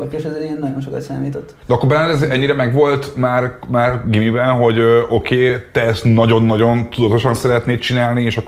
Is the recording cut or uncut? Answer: uncut